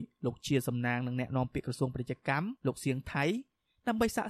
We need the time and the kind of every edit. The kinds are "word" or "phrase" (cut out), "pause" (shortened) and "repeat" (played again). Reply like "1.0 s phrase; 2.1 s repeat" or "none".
2.6 s pause